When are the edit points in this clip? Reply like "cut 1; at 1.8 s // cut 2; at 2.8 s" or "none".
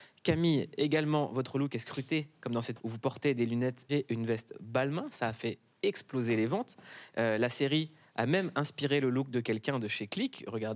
cut 1; at 2.8 s // cut 2; at 3.9 s